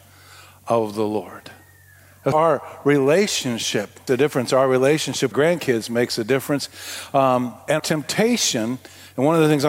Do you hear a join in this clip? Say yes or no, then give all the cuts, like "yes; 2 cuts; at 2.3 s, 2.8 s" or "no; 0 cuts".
yes; 4 cuts; at 2.3 s, 4.1 s, 5.3 s, 7.8 s